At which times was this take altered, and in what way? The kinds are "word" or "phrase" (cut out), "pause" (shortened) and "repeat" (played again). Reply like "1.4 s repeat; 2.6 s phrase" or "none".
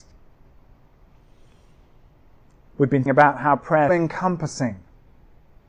3.1 s word; 3.9 s phrase

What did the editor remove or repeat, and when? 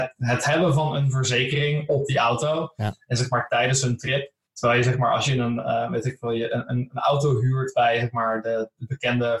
4.4 s pause

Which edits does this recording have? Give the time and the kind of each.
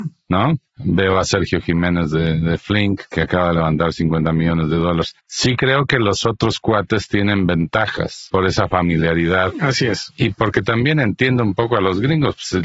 none

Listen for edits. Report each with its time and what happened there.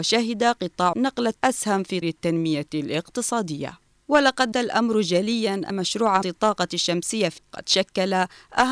0.9 s word; 1.4 s word; 2.0 s word; 4.5 s word; 5.7 s word; 6.2 s word; 7.4 s word

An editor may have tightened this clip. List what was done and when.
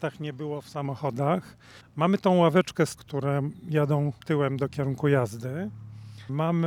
1.8 s pause; 3.0 s phrase; 4.2 s pause

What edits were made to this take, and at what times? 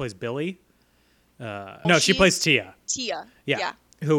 1.8 s word

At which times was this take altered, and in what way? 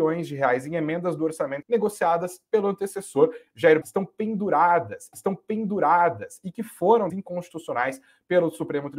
1.6 s word; 3.8 s word; 5.1 s repeat; 7.1 s word

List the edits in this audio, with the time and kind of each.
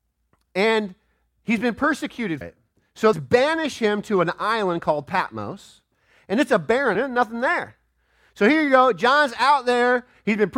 2.4 s word; 3.1 s phrase; 6.9 s word

